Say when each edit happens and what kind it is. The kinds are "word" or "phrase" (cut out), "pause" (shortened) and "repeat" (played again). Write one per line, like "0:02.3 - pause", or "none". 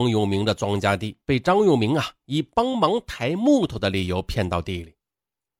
0:01.2 - pause